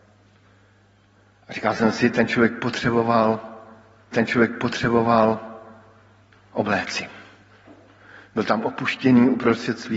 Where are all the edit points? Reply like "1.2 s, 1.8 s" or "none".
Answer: 4.1 s